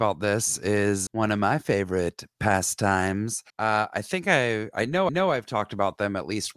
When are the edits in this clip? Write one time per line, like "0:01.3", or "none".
0:01.1
0:03.5
0:05.1